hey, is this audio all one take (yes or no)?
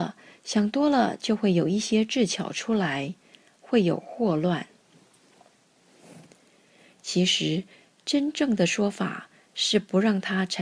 yes